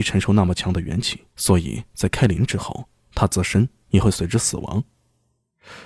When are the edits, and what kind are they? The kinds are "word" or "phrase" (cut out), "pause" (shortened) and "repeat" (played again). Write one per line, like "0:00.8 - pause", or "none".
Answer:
0:01.3 - pause